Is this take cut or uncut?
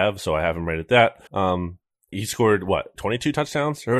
cut